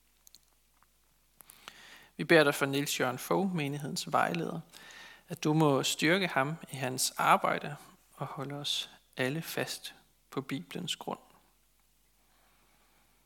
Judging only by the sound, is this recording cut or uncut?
uncut